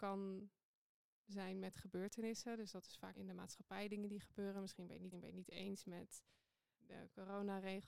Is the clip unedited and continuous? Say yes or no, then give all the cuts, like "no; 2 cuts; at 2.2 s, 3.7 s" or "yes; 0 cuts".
no; 3 cuts; at 3.1 s, 5.1 s, 6.7 s